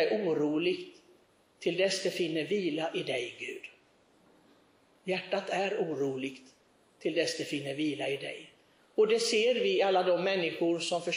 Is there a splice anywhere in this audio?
no; 0 cuts

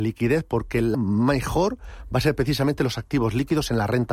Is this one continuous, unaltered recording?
no; 1 cut; at 0.9 s

